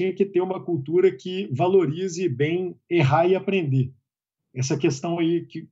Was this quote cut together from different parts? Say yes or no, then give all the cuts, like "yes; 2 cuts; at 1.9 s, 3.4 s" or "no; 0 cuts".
no; 0 cuts